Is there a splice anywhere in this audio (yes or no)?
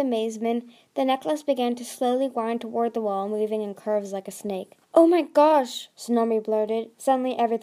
yes